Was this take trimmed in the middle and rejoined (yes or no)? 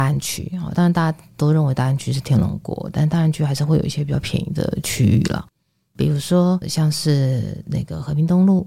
no